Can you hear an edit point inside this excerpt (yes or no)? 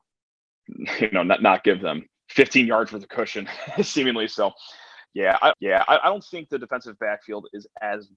yes